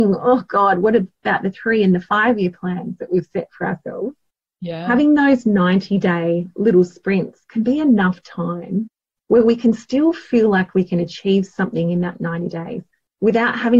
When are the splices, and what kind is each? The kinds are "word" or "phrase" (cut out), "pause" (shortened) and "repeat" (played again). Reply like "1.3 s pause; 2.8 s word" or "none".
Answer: none